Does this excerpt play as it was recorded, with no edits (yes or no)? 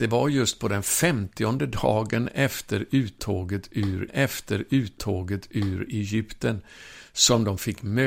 no